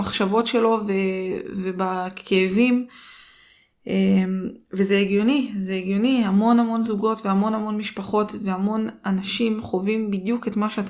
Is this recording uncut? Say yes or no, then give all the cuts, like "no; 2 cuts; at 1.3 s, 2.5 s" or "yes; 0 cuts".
yes; 0 cuts